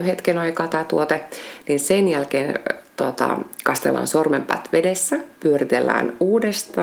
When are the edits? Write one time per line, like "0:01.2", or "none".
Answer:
0:05.4